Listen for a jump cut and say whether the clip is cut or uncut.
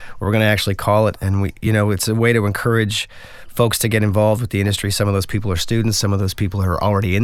uncut